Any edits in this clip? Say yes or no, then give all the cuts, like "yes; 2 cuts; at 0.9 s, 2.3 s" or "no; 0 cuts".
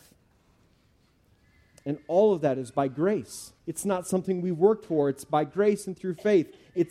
yes; 1 cut; at 3.6 s